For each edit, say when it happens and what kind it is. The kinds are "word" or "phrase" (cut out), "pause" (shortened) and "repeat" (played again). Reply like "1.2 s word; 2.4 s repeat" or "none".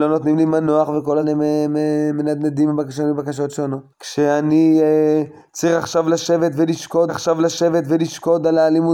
1.2 s word; 3.9 s pause; 7.1 s repeat